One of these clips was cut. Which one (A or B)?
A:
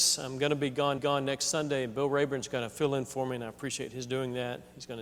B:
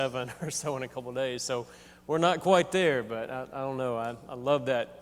A